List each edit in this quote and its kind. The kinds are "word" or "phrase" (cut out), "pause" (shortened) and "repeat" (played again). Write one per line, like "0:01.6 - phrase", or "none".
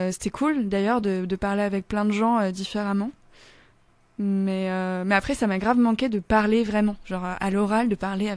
none